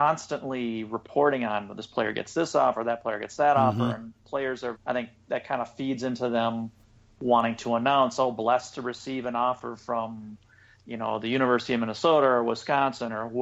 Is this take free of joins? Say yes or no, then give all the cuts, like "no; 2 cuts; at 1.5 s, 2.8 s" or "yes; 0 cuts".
no; 1 cut; at 4.7 s